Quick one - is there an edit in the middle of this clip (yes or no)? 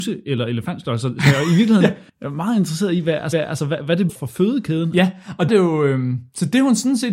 yes